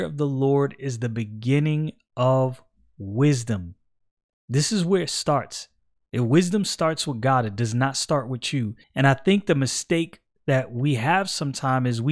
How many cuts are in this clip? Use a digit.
1